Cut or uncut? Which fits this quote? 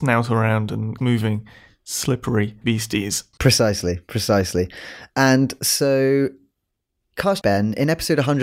cut